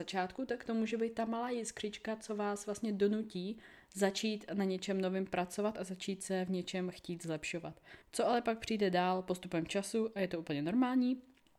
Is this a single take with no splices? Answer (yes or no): no